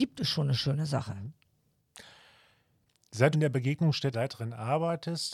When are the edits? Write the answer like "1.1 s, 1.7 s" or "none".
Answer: 3.3 s, 4.1 s